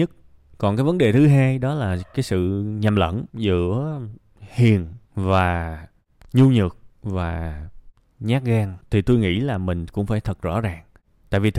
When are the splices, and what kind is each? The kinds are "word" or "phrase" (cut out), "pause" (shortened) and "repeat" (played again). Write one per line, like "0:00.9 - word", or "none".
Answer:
0:03.3 - pause
0:05.0 - pause
0:06.9 - pause
0:08.8 - pause